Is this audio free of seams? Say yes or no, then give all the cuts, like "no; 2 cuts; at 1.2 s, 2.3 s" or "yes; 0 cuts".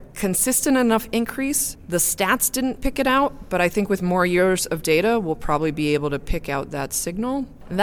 yes; 0 cuts